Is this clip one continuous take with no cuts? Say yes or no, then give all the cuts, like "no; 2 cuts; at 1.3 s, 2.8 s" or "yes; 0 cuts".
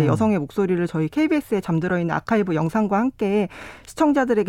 yes; 0 cuts